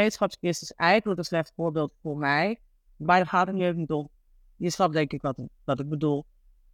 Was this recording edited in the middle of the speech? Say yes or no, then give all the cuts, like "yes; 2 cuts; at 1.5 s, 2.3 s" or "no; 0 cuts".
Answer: no; 0 cuts